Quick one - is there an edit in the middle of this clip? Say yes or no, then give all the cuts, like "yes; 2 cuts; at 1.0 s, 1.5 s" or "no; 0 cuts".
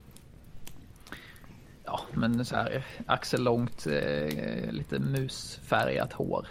no; 0 cuts